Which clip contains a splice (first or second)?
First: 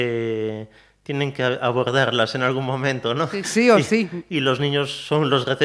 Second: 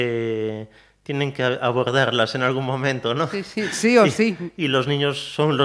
first